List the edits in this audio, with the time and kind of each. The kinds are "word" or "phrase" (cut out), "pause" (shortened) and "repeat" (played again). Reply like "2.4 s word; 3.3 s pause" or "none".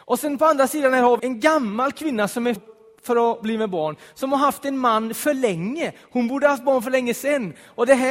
1.2 s word; 2.6 s phrase